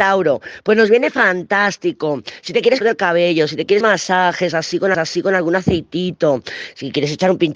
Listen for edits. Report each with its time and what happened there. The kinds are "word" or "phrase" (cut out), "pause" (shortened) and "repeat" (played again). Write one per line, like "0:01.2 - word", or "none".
0:02.8 - phrase
0:03.8 - word
0:04.9 - repeat